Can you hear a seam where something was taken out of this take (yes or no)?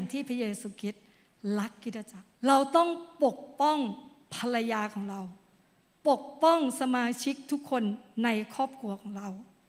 yes